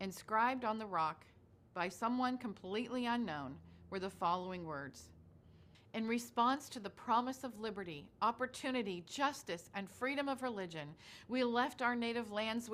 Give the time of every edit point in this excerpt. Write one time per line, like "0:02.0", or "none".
none